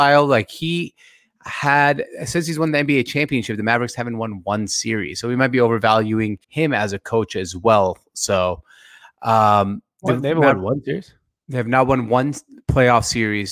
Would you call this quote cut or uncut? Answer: cut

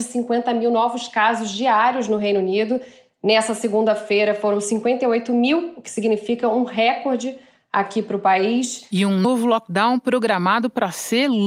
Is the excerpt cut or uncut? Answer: uncut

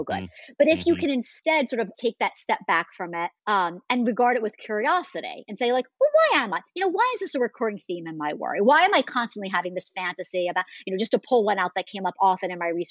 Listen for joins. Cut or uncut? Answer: cut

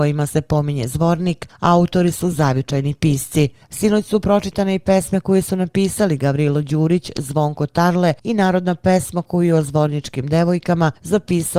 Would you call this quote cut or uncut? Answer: uncut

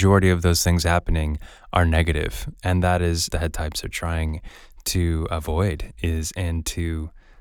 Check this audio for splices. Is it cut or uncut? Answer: cut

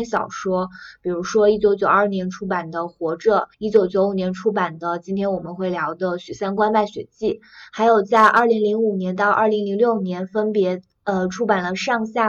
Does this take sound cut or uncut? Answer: cut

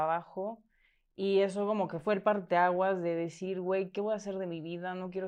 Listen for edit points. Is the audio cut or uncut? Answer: uncut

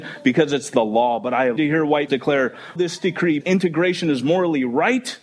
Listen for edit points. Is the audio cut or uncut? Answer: cut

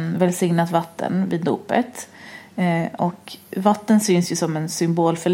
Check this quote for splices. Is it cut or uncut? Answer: uncut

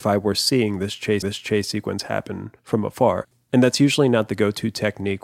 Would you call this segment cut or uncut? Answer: cut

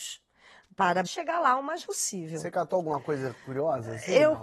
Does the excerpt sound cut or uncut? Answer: cut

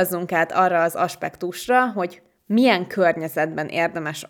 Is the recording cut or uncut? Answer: uncut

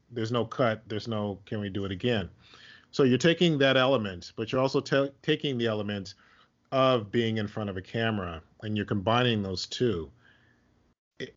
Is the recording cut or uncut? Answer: uncut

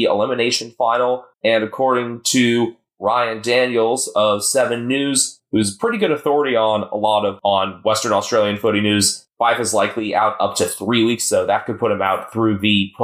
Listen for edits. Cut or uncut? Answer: cut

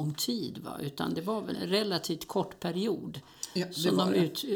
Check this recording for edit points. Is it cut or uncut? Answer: cut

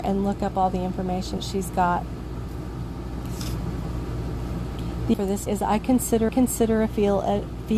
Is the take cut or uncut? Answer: cut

